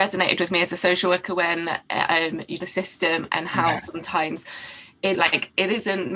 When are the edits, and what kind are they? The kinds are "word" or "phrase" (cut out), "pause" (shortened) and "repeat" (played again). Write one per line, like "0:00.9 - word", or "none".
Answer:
0:02.6 - phrase
0:05.1 - phrase